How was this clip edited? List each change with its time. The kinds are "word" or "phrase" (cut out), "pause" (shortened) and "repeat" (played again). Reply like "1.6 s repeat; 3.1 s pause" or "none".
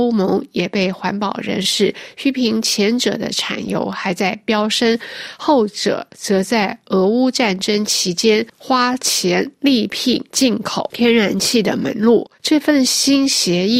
12.3 s pause